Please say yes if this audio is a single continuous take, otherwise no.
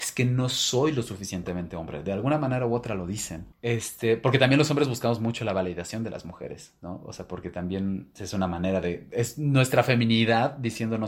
no